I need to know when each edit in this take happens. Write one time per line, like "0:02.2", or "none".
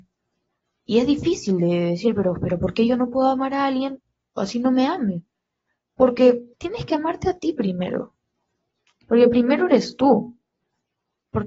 0:06.5